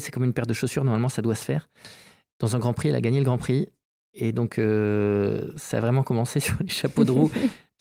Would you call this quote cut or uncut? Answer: uncut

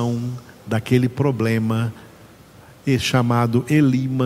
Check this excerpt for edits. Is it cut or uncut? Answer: uncut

